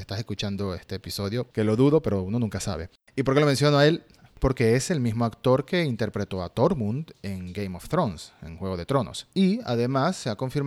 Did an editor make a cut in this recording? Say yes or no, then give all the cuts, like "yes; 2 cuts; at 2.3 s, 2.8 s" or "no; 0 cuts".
yes; 3 cuts; at 1.5 s, 3.0 s, 9.3 s